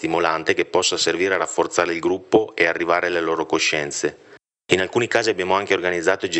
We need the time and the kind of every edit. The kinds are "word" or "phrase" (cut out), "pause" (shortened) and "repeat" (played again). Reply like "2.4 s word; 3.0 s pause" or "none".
none